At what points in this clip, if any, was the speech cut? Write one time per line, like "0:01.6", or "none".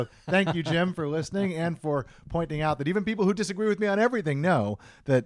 none